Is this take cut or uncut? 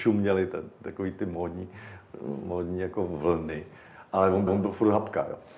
cut